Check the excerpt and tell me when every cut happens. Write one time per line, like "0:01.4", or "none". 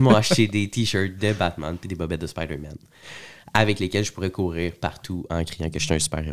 none

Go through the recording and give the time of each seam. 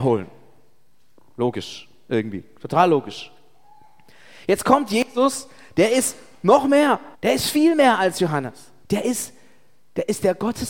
0:07.1
0:08.8

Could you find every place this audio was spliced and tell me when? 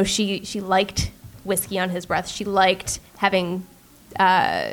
0:03.1

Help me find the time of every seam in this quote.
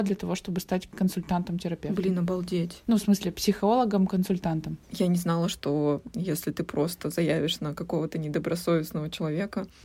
0:04.8

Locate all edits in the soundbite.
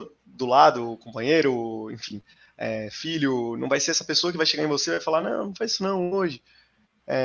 none

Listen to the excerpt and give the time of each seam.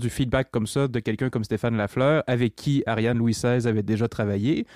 none

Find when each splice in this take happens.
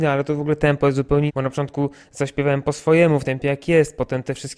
0:01.3
0:03.2

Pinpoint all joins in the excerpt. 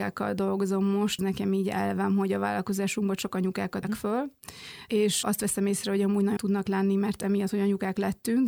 0:01.2
0:03.8
0:06.4

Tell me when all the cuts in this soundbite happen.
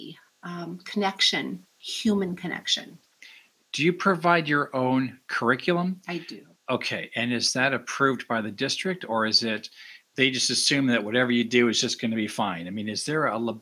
none

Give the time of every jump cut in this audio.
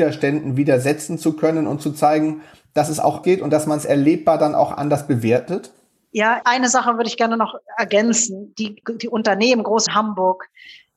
0:03.2
0:06.4
0:08.8
0:09.9

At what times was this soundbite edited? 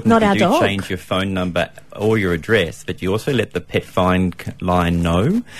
none

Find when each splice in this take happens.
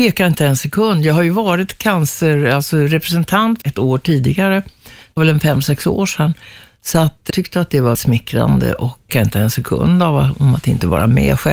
0:03.6
0:05.2
0:07.3
0:07.9
0:09.1

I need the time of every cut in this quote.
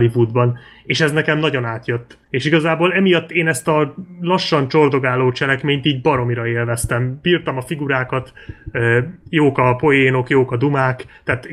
0:02.2

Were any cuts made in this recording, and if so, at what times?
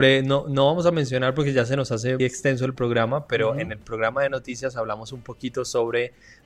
0:02.2

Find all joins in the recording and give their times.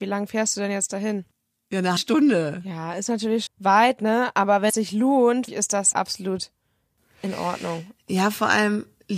0:02.0
0:03.5
0:04.7
0:05.5
0:05.9

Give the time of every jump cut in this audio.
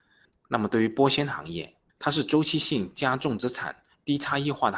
0:01.9

